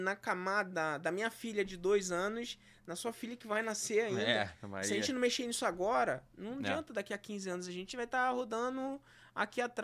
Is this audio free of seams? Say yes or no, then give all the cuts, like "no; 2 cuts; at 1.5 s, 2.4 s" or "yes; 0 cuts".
yes; 0 cuts